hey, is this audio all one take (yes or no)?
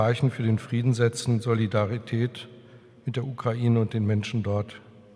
yes